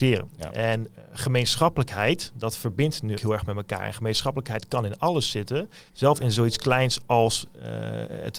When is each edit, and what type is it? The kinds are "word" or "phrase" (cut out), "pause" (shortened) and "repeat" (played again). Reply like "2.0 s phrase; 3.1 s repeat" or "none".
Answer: 3.2 s word; 5.9 s pause